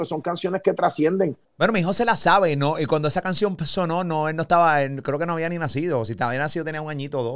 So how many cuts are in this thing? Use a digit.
1